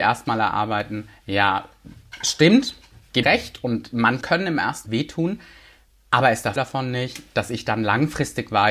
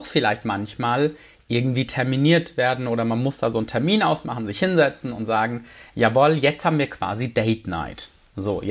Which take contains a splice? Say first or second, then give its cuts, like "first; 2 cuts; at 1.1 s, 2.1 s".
first; 4 cuts; at 3.2 s, 4.2 s, 4.9 s, 6.6 s